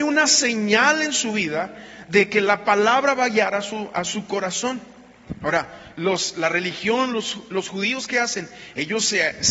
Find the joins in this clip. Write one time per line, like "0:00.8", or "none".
none